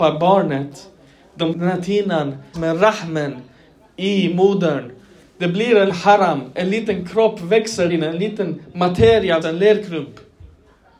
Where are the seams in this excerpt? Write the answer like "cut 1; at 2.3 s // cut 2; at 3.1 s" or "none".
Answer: cut 1; at 1.5 s // cut 2; at 2.5 s // cut 3; at 5.9 s // cut 4; at 7.9 s // cut 5; at 9.4 s